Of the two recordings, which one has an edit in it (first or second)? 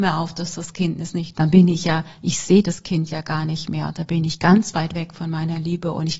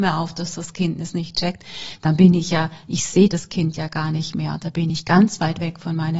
first